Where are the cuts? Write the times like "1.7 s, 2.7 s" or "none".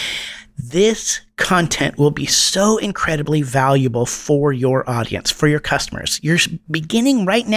none